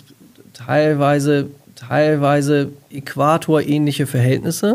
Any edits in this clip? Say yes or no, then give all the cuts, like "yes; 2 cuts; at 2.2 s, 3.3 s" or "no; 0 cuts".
yes; 1 cut; at 1.7 s